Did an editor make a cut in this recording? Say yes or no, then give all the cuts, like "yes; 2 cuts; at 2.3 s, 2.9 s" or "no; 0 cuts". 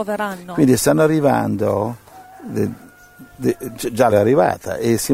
yes; 1 cut; at 4.1 s